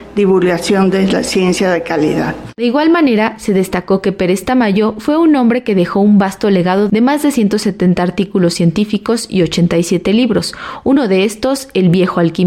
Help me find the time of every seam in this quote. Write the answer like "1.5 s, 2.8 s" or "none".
none